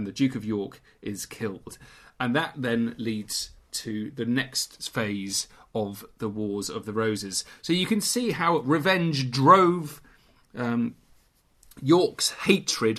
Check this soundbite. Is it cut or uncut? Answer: uncut